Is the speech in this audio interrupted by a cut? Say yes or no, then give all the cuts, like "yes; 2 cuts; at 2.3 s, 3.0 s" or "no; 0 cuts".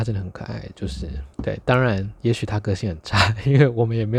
yes; 1 cut; at 1.3 s